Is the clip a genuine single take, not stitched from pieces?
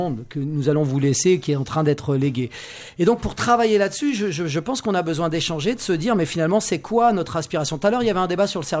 yes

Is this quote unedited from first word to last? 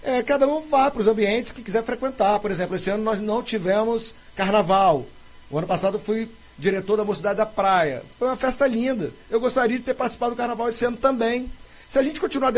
yes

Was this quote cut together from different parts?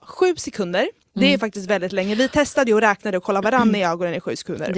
no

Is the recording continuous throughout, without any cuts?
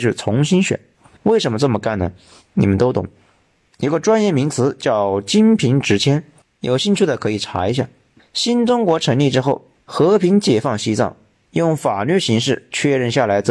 yes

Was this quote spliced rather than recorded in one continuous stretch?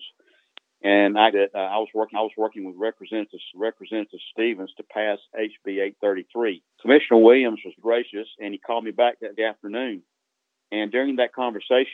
yes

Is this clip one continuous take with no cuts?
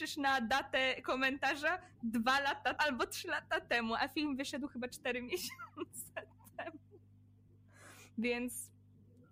no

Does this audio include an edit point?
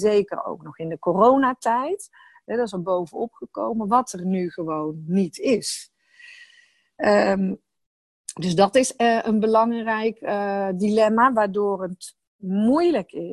no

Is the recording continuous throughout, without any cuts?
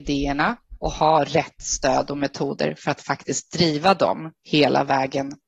yes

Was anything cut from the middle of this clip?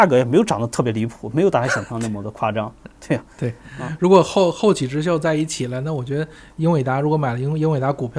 no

